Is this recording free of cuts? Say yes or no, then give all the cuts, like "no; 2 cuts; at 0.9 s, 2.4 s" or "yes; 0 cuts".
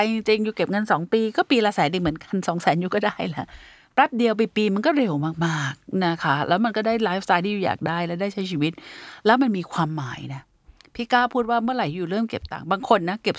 yes; 0 cuts